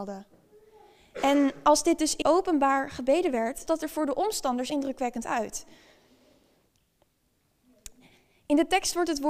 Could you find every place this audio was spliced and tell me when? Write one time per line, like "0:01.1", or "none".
0:02.2
0:03.7
0:04.7